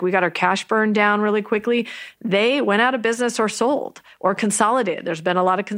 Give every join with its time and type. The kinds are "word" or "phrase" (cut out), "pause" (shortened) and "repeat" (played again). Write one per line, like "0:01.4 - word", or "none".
none